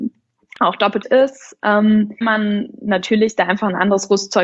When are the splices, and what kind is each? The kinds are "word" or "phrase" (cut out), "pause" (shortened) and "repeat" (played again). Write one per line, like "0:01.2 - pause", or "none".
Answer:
0:01.0 - word
0:02.2 - word